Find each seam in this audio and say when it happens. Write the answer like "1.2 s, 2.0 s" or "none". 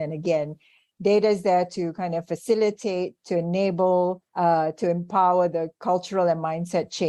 4.3 s